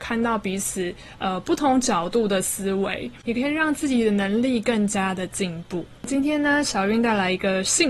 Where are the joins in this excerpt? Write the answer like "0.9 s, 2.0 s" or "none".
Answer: 6.0 s